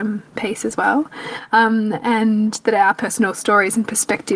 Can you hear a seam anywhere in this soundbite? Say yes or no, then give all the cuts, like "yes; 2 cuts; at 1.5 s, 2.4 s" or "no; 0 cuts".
no; 0 cuts